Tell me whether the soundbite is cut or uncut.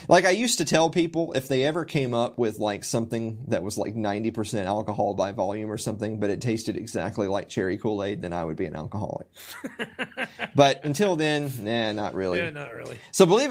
uncut